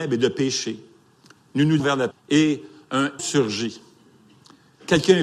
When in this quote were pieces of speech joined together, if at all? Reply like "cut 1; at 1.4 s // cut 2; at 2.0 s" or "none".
cut 1; at 1.8 s // cut 2; at 2.1 s // cut 3; at 3.2 s